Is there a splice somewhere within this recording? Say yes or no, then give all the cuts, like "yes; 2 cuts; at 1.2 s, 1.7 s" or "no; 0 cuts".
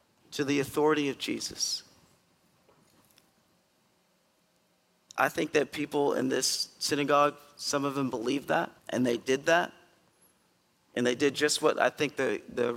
yes; 1 cut; at 8.8 s